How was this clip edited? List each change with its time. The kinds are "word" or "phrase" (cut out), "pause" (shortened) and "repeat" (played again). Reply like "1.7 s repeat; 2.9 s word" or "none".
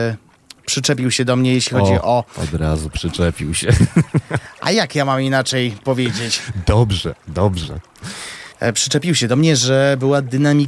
8.5 s pause